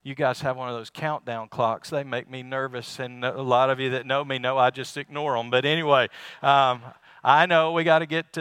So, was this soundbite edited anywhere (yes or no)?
no